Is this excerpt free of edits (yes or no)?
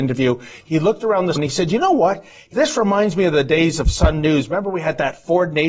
no